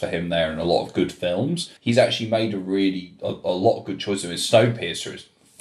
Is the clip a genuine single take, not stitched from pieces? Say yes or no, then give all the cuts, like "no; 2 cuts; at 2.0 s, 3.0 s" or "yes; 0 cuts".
no; 1 cut; at 1.8 s